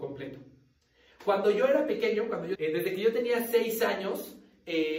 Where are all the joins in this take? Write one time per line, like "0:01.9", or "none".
0:02.5